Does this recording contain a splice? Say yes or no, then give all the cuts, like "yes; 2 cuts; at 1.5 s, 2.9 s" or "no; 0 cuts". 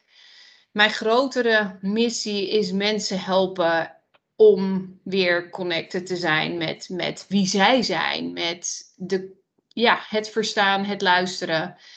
no; 0 cuts